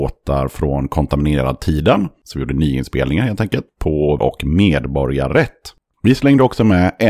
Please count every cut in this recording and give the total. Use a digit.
1